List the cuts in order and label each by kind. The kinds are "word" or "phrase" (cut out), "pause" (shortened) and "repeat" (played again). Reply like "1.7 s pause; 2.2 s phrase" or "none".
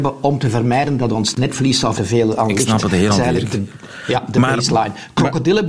1.9 s phrase; 3.1 s word